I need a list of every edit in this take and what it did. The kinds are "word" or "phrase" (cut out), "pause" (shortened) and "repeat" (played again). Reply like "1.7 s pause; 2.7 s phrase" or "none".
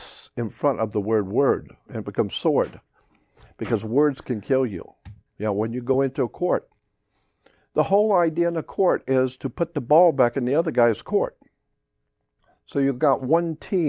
none

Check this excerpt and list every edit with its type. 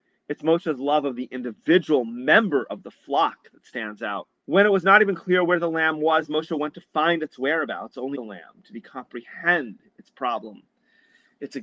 4.4 s pause; 8.1 s phrase

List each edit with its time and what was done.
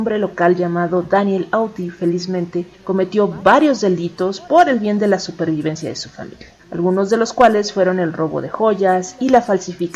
2.7 s pause; 6.6 s pause

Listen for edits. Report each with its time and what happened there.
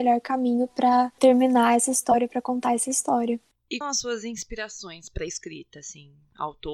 3.8 s phrase

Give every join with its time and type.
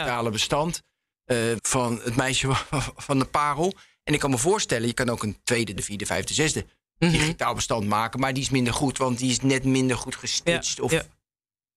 1.6 s word; 5.8 s word

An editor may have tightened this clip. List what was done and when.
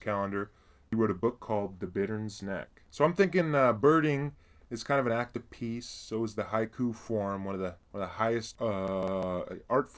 none

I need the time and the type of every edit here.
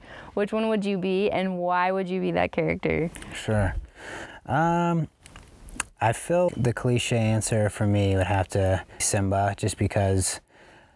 6.5 s word; 9.0 s word

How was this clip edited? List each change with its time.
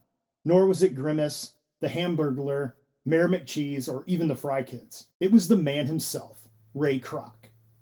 5.1 s pause

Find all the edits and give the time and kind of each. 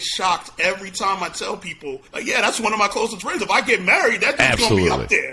2.1 s pause

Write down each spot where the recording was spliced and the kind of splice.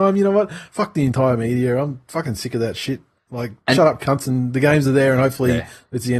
none

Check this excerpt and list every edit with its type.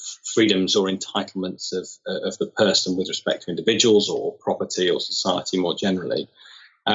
none

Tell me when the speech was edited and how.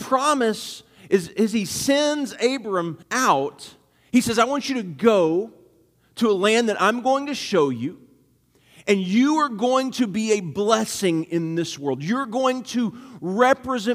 3.0 s pause

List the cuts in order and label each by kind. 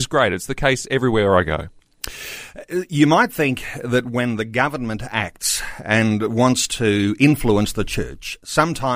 none

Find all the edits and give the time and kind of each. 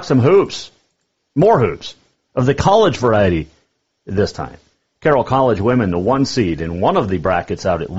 none

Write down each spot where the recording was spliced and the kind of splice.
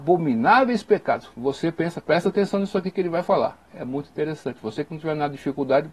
none

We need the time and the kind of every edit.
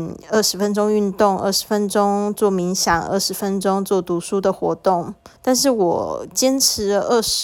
5.4 s pause

